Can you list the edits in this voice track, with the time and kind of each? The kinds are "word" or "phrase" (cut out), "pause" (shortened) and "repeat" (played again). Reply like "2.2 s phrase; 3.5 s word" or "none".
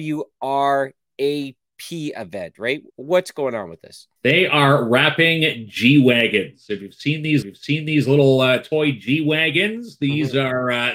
2.9 s pause; 4.2 s pause; 7.4 s repeat